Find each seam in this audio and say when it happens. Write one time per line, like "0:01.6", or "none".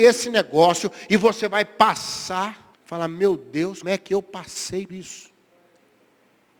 0:02.7
0:03.8
0:04.9